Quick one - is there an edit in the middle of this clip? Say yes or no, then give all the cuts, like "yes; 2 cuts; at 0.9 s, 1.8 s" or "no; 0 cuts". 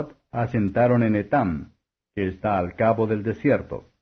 no; 0 cuts